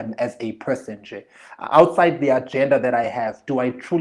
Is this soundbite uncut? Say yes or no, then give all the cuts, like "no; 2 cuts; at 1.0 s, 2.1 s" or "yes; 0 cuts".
yes; 0 cuts